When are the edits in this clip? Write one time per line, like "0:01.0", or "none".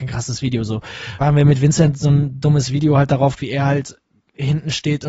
0:01.2
0:03.4